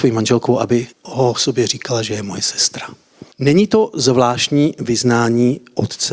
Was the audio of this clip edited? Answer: yes; 2 cuts; at 0.9 s, 3.3 s

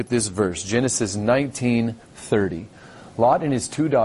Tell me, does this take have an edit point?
yes; 1 cut; at 2.0 s

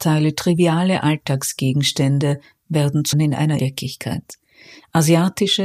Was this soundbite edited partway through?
yes; 2 cuts; at 3.1 s, 3.6 s

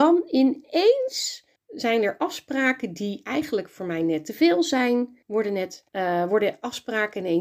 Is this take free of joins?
no; 3 cuts; at 1.6 s, 5.2 s, 5.9 s

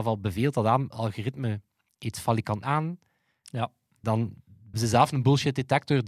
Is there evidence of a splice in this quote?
yes; 3 cuts; at 0.9 s, 2.6 s, 4.7 s

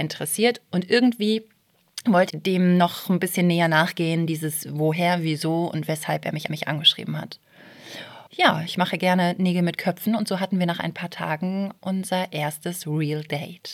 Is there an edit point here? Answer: yes; 3 cuts; at 2.3 s, 6.5 s, 8.3 s

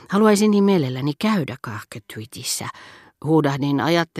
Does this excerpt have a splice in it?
no; 0 cuts

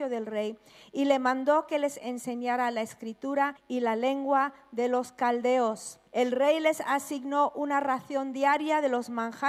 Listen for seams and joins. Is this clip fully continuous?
no; 2 cuts; at 3.6 s, 6.1 s

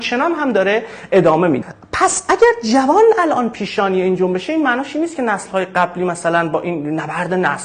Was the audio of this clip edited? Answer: no; 0 cuts

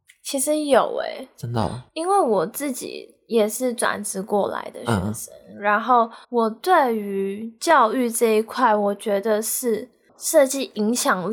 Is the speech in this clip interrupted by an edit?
yes; 1 cut; at 6.2 s

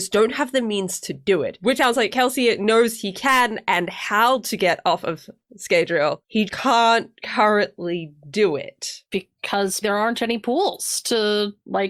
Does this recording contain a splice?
yes; 3 cuts; at 1.8 s, 6.5 s, 9.8 s

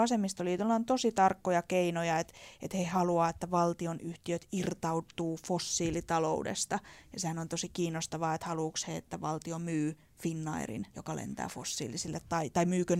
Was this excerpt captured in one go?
no; 1 cut; at 10.9 s

